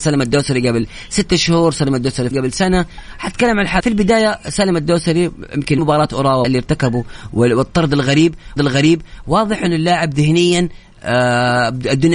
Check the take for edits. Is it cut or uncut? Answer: cut